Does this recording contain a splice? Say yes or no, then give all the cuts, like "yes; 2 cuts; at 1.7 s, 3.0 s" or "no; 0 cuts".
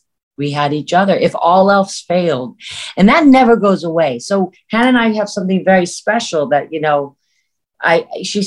no; 0 cuts